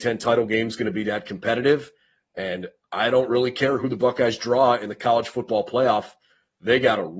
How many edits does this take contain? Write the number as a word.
zero